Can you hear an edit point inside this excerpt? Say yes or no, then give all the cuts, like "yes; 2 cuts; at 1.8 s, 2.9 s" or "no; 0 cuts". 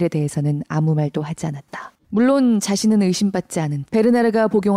yes; 2 cuts; at 2.0 s, 3.9 s